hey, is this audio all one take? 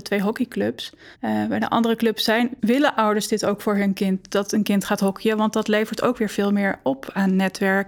no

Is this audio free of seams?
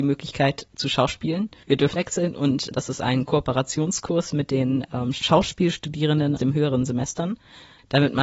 no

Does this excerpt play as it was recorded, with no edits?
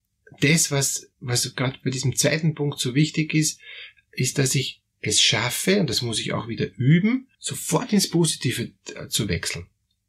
no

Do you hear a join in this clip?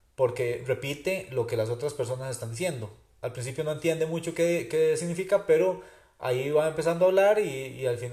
no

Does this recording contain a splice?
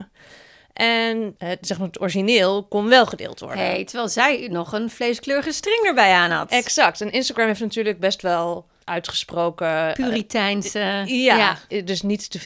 no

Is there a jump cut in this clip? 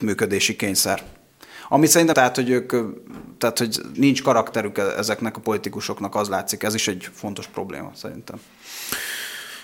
yes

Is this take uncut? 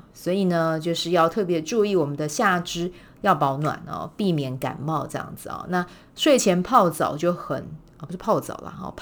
yes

